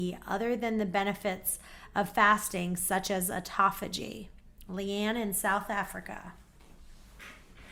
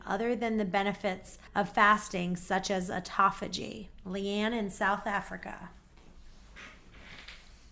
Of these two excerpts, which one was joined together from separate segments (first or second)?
second